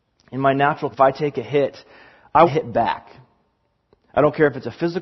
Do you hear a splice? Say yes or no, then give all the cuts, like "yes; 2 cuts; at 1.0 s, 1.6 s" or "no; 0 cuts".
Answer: yes; 2 cuts; at 0.9 s, 2.5 s